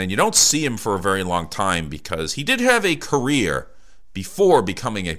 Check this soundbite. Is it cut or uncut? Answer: uncut